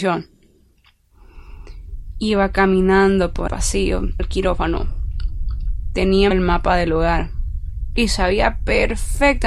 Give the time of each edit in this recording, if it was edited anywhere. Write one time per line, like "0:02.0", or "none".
0:03.5
0:04.2
0:06.3

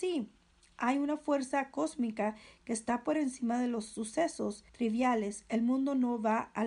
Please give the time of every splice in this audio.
0:04.7

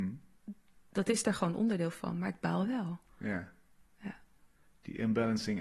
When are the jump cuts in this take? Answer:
none

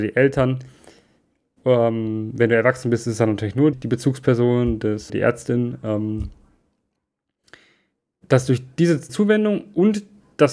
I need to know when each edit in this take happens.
0:03.7
0:05.1
0:09.1

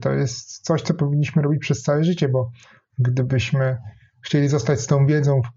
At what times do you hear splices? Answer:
none

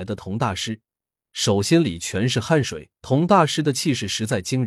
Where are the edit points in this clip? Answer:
0:03.0

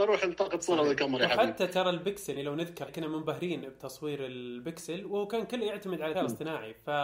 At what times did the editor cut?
0:02.4
0:02.9
0:06.1

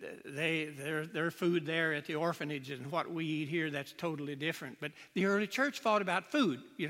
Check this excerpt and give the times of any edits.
none

